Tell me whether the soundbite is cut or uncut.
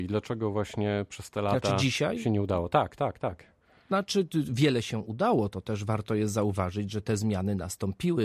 uncut